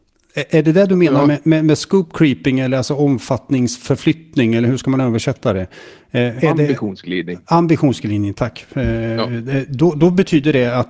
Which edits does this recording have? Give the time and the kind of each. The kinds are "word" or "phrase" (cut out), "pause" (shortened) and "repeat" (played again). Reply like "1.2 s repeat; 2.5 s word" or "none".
6.4 s word